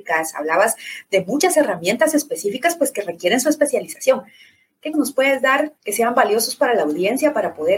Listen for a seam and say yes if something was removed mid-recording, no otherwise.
yes